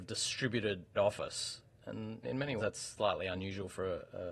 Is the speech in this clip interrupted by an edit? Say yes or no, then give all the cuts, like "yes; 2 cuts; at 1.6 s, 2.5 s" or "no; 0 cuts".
yes; 3 cuts; at 1.0 s, 2.2 s, 2.6 s